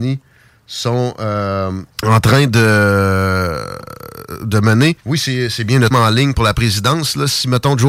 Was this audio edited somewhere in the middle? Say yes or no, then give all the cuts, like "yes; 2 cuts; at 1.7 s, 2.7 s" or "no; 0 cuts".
yes; 3 cuts; at 1.9 s, 5.0 s, 5.9 s